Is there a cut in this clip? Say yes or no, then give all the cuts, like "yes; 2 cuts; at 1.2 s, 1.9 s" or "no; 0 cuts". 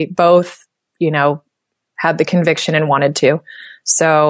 no; 0 cuts